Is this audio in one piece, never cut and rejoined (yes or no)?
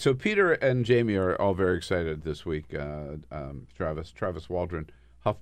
yes